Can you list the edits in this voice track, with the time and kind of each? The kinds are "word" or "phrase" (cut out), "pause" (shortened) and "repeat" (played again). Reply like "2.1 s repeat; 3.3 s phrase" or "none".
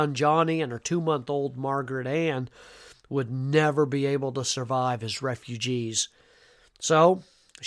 none